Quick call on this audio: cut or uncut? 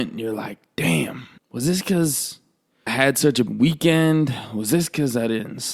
cut